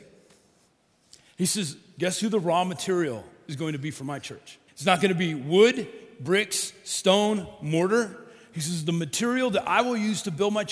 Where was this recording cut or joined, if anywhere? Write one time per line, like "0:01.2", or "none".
0:04.7